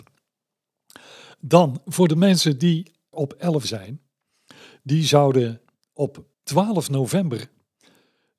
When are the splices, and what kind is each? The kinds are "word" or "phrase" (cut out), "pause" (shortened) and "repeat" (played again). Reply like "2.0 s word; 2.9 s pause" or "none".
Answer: 3.1 s word; 3.6 s phrase; 6.3 s pause